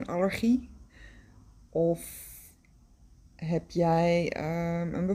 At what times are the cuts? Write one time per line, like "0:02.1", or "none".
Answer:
none

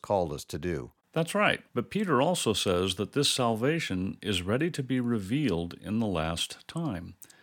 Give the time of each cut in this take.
0:01.0
0:01.7

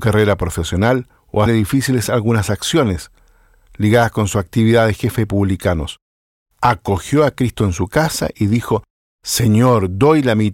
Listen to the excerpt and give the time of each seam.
0:01.5

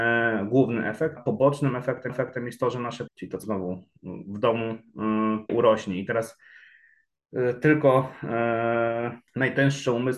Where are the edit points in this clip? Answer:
0:01.2
0:02.1
0:03.1
0:03.4
0:05.5
0:09.3

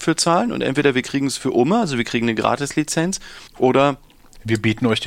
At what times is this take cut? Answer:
0:03.5

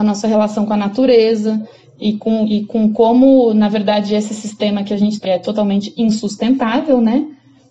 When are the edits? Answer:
0:05.2

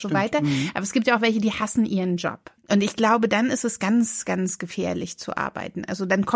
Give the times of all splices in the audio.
0:02.6

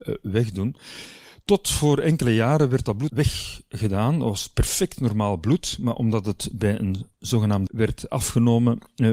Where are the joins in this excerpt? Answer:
0:03.1
0:07.7

